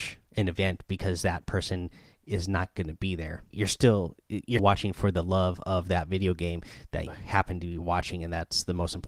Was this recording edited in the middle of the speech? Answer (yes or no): yes